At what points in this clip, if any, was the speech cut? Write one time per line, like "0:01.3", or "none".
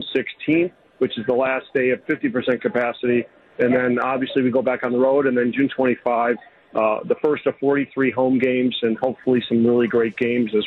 none